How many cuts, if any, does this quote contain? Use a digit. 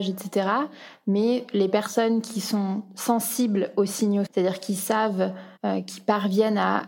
2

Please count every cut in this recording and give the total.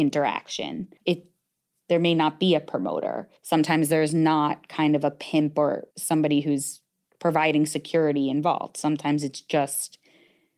3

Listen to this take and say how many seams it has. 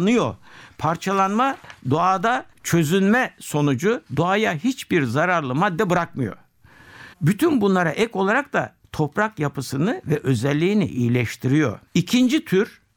3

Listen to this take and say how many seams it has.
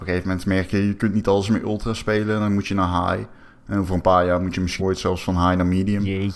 1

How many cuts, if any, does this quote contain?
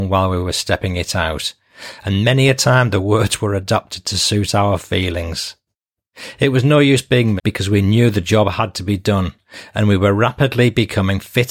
1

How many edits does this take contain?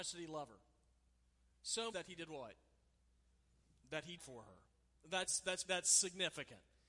3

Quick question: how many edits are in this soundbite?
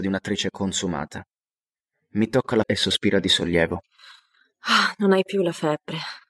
1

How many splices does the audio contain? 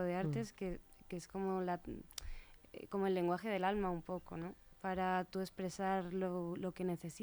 0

